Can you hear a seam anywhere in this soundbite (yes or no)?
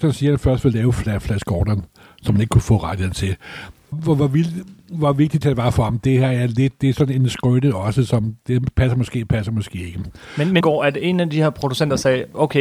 yes